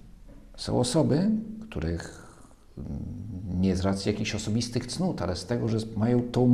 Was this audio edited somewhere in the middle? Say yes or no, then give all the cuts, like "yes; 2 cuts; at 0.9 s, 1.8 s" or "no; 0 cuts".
no; 0 cuts